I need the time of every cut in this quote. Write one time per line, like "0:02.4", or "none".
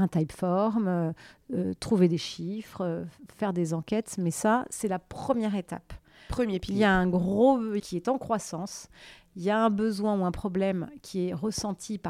0:07.8